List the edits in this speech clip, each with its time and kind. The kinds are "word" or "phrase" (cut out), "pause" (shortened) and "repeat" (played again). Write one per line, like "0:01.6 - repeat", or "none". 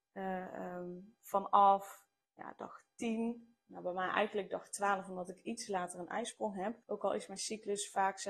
0:02.2 - pause
0:06.8 - pause